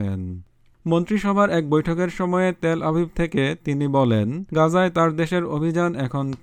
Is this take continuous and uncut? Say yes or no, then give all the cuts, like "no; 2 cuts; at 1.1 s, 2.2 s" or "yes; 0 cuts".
no; 1 cut; at 4.5 s